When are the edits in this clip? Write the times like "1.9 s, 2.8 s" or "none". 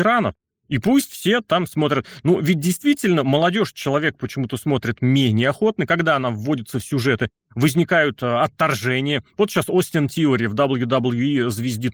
none